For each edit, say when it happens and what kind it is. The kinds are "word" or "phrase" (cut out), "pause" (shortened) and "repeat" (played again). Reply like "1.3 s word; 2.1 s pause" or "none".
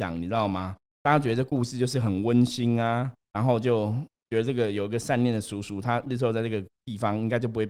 3.2 s pause

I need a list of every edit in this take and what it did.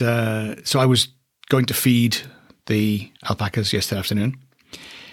3.2 s pause

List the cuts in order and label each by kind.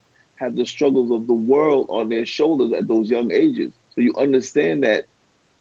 3.8 s pause

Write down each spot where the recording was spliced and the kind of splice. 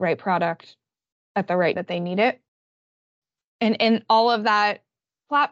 1.8 s word

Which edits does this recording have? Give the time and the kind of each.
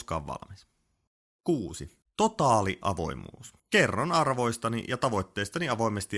2.0 s pause; 3.6 s pause

